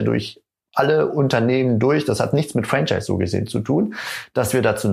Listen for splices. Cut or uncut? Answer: uncut